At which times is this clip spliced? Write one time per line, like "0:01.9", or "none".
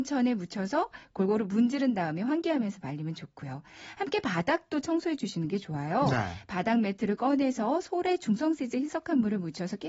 none